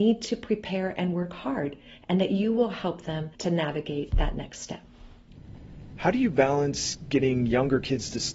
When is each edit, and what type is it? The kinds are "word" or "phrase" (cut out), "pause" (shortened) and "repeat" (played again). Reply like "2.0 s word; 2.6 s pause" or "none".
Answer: 3.3 s pause